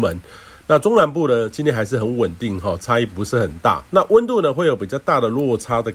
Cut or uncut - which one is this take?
cut